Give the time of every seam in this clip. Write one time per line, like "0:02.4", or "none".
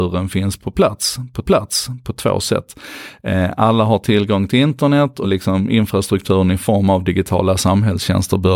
0:01.4
0:05.2